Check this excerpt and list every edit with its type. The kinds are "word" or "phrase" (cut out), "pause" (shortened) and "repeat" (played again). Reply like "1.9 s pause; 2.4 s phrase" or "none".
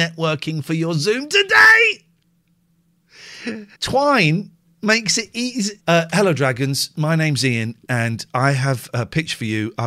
3.7 s pause; 5.8 s pause